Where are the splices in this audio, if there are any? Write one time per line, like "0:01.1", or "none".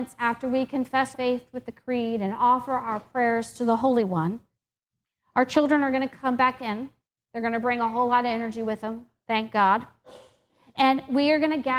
0:01.1